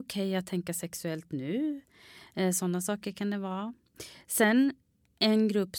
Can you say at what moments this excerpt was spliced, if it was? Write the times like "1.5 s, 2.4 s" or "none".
none

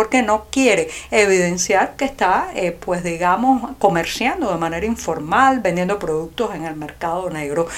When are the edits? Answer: none

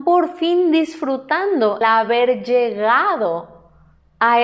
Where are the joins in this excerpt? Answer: 1.8 s

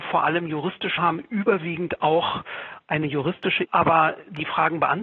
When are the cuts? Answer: 1.0 s, 3.6 s

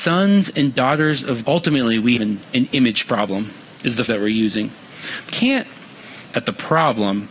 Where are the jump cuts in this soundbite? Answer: 1.4 s, 2.2 s, 2.5 s, 3.7 s, 4.1 s, 5.3 s, 6.2 s

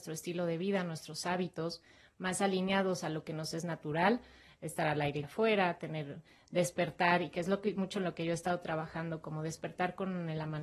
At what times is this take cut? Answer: 5.2 s

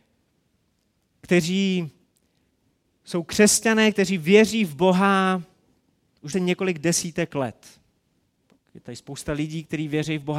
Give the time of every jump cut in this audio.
6.3 s

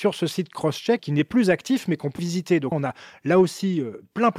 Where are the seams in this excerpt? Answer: 1.0 s, 2.2 s, 2.7 s

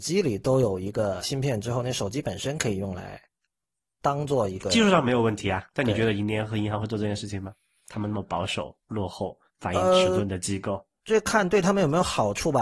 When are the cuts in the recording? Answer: 1.2 s, 7.8 s, 9.5 s

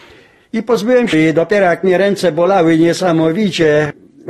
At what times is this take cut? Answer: 1.1 s

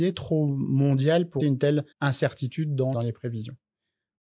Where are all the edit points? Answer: 1.4 s, 1.9 s, 2.9 s

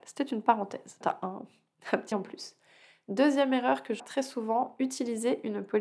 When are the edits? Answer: 1.0 s, 2.1 s, 4.0 s

